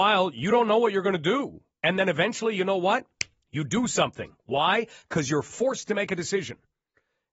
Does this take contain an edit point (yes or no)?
no